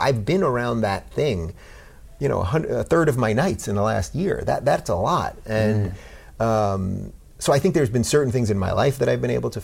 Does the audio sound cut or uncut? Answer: uncut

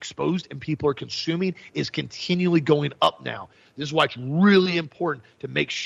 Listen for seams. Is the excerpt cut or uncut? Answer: uncut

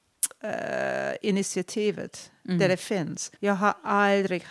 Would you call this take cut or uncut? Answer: cut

